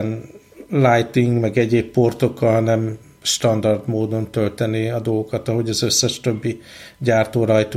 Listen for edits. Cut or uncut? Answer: uncut